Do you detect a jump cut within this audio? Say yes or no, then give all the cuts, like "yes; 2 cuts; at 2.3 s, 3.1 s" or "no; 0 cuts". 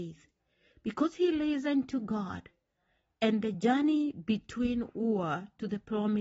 no; 0 cuts